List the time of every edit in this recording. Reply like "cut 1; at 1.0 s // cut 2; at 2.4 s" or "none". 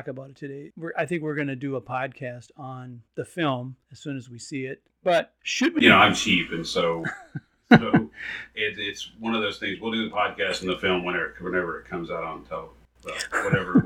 none